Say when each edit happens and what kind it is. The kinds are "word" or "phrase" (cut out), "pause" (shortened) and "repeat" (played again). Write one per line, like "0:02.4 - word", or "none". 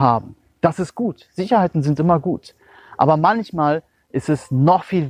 none